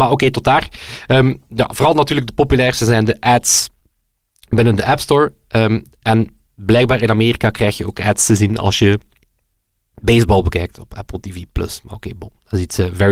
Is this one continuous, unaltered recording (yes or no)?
yes